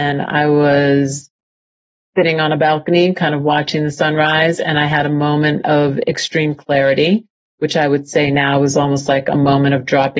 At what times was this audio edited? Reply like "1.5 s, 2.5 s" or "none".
none